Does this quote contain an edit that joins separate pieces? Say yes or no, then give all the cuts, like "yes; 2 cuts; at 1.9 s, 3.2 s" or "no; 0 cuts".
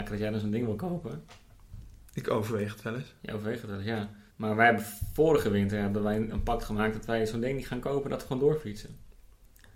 yes; 1 cut; at 4.3 s